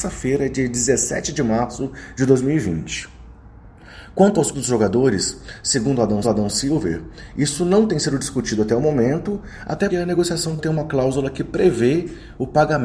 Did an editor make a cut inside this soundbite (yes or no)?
yes